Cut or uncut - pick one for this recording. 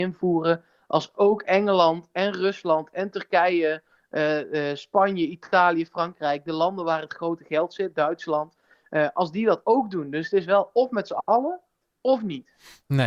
uncut